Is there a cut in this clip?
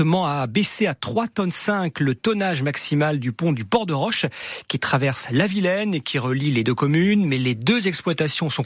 no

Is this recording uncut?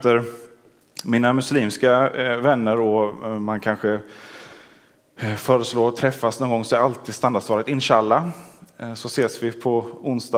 yes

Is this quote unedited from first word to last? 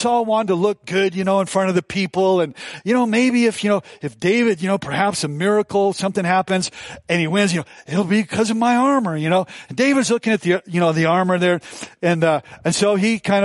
yes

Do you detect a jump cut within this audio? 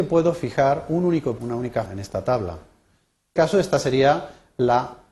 yes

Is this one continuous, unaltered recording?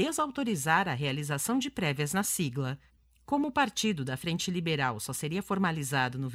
no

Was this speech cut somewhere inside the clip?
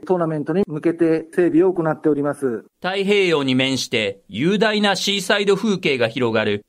yes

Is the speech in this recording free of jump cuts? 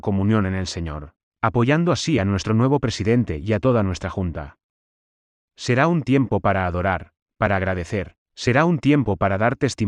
yes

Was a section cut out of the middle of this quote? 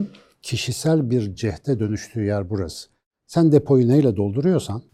no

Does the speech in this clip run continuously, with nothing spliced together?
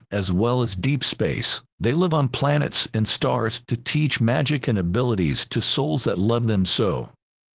no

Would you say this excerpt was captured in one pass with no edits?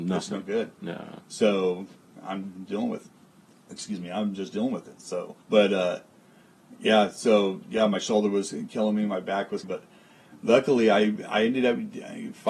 no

